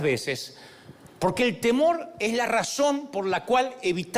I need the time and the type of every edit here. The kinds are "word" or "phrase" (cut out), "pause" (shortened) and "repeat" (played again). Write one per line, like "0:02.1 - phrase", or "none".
none